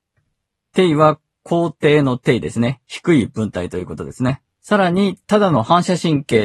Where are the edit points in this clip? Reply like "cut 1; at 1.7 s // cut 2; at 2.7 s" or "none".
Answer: cut 1; at 4.5 s // cut 2; at 5.2 s